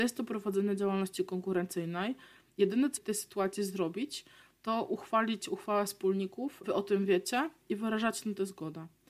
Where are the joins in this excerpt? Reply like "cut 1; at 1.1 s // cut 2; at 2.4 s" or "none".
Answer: cut 1; at 3.0 s // cut 2; at 6.6 s